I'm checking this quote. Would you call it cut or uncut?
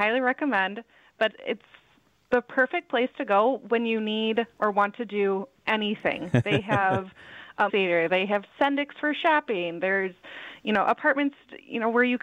cut